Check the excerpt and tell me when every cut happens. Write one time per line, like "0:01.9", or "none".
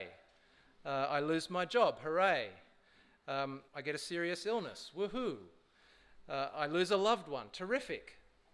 0:03.7